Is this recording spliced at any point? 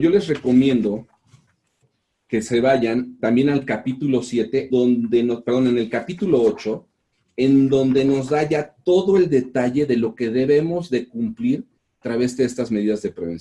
yes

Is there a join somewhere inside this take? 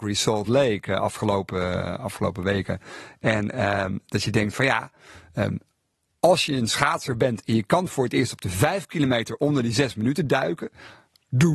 no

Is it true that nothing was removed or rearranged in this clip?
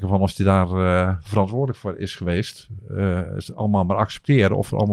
yes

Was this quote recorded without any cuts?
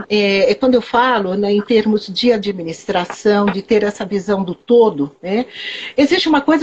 yes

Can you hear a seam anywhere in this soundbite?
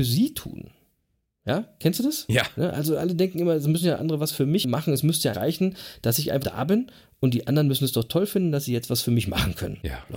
yes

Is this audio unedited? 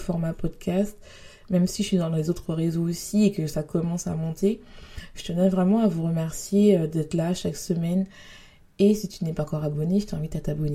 yes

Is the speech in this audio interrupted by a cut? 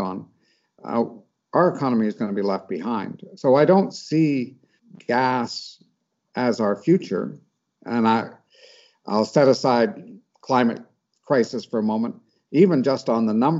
yes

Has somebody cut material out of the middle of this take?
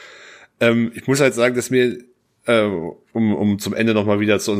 no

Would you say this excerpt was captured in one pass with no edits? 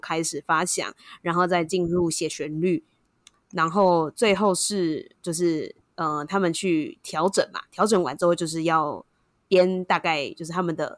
yes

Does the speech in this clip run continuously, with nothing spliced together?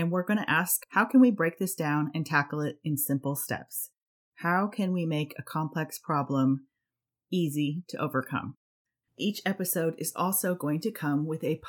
yes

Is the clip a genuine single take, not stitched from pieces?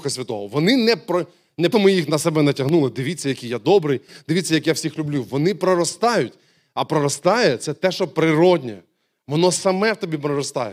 no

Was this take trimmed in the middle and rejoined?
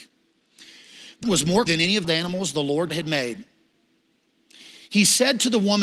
yes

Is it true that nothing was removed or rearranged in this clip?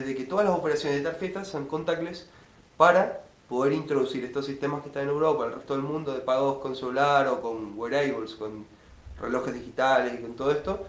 yes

